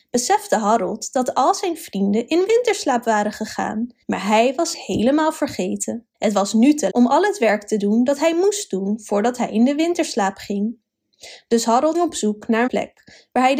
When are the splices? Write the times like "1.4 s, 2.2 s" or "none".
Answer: 4.0 s, 4.7 s, 6.1 s, 6.9 s, 11.9 s, 12.7 s

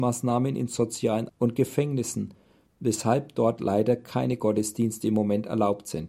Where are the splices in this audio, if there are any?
1.3 s

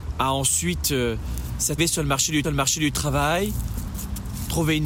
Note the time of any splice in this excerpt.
1.8 s, 2.4 s

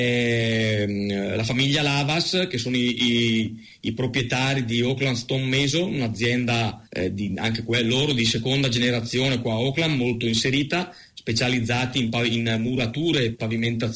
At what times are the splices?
6.9 s

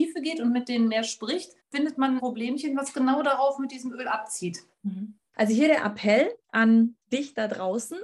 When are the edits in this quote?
1.6 s, 2.2 s

